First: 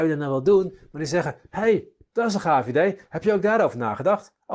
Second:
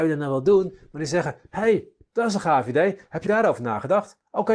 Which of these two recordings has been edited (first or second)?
second